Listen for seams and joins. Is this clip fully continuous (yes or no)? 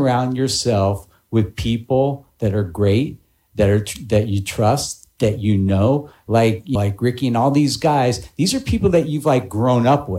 no